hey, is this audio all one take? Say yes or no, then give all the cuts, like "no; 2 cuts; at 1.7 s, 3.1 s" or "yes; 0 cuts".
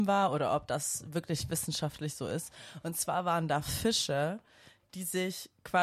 yes; 0 cuts